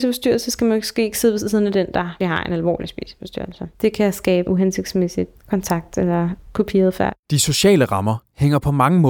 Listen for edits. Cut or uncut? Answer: cut